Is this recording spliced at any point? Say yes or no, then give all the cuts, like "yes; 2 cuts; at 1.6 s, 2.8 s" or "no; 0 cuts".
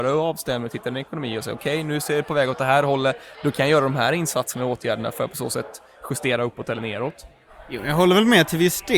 no; 0 cuts